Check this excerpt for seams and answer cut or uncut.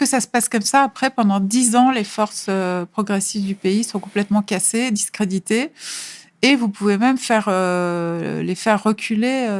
uncut